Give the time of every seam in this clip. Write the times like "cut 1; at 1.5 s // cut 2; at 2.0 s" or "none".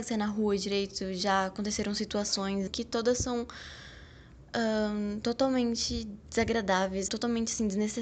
cut 1; at 2.7 s // cut 2; at 7.1 s